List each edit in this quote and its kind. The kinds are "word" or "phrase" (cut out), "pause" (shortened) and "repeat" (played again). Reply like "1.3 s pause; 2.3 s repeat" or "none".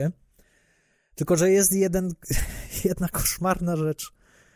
none